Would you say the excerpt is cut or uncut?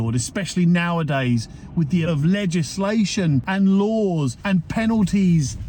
cut